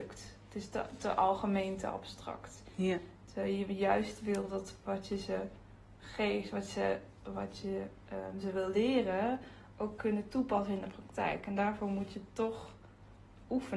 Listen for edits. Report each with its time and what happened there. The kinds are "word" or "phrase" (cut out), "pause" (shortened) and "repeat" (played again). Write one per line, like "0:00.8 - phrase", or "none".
none